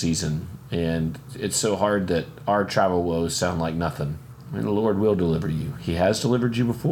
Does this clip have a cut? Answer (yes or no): no